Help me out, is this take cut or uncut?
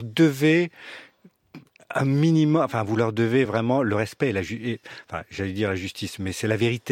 uncut